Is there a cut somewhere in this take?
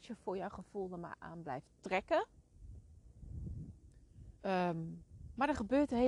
yes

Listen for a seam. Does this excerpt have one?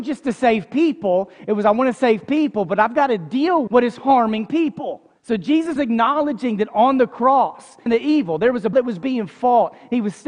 yes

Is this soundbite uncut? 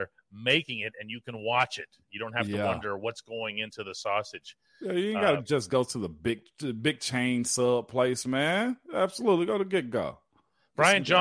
yes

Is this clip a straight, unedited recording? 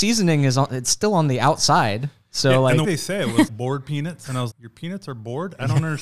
no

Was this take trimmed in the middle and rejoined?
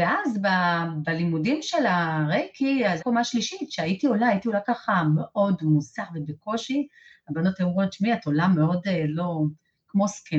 yes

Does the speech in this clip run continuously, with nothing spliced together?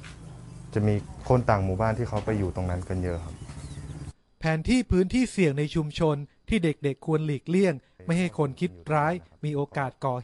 yes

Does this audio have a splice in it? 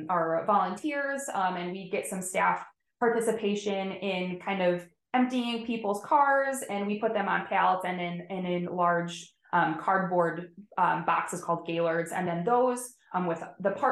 no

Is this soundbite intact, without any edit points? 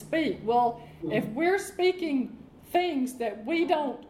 yes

